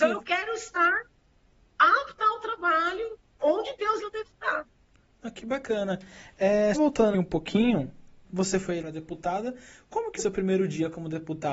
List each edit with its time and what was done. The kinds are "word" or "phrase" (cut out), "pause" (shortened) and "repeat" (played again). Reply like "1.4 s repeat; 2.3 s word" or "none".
1.6 s word; 3.4 s word; 4.0 s word; 6.7 s word; 7.1 s word; 8.2 s word; 8.8 s word; 10.2 s word